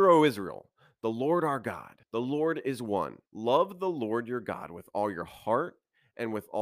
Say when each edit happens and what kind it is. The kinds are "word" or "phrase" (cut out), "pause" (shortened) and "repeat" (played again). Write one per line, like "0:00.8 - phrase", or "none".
0:02.0 - pause
0:03.3 - pause